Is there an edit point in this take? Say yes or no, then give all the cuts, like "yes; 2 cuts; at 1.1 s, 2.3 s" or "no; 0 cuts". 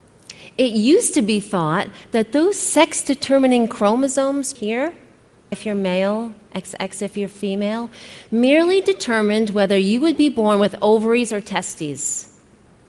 yes; 2 cuts; at 4.5 s, 5.5 s